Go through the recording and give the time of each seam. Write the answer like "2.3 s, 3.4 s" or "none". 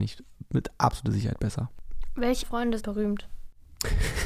2.4 s, 2.8 s